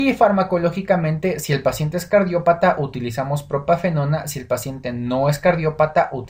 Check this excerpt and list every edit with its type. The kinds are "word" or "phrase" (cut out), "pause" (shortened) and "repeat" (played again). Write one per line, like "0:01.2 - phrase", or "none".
none